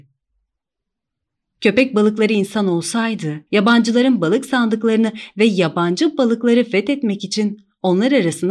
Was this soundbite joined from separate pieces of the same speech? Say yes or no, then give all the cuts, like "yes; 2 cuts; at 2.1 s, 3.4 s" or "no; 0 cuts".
yes; 1 cut; at 3.5 s